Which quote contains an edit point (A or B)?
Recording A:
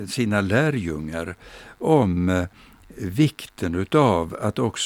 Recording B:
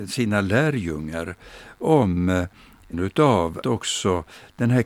B